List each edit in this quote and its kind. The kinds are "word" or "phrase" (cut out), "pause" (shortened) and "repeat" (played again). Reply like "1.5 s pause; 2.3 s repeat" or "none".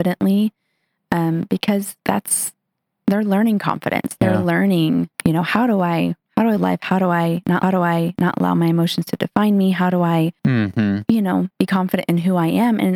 2.0 s pause; 5.1 s pause; 6.3 s pause; 6.6 s phrase; 7.6 s repeat; 10.4 s pause; 11.5 s pause